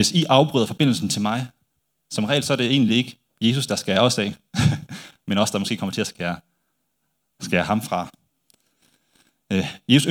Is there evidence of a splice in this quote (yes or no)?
no